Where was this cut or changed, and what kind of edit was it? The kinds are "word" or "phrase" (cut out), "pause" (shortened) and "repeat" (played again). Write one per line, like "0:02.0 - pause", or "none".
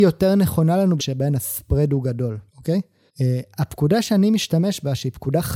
0:01.0 - word
0:02.5 - pause
0:03.1 - pause